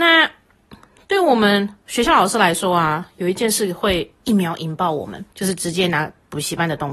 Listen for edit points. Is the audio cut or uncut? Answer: cut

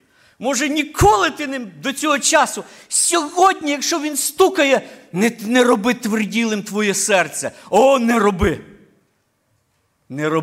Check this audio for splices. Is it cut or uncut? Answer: uncut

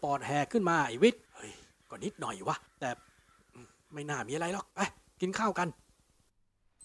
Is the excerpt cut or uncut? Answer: cut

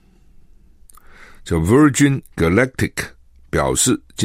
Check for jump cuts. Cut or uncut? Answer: cut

